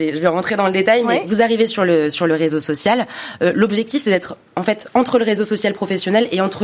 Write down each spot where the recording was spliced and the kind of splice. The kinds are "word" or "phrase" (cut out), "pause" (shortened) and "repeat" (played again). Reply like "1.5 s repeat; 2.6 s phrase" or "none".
none